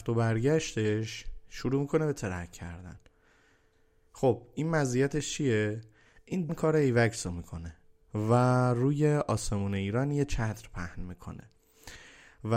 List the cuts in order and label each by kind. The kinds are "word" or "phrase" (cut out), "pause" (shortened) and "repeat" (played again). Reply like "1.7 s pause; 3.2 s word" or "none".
6.5 s word